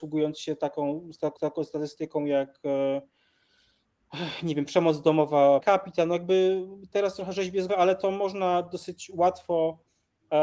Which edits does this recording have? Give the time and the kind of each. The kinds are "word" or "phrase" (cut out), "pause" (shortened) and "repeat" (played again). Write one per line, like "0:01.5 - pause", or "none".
0:01.4 - repeat
0:05.6 - word
0:07.7 - word